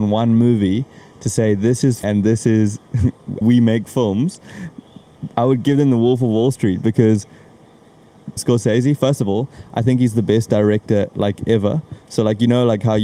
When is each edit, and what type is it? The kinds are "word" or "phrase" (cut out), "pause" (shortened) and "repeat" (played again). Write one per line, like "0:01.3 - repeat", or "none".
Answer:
0:02.0 - word
0:03.4 - word
0:05.3 - pause
0:08.4 - phrase